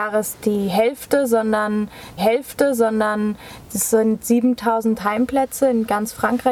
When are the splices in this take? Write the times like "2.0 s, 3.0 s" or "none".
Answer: 2.2 s